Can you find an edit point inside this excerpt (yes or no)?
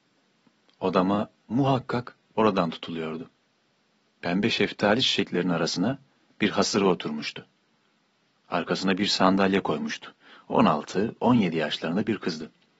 yes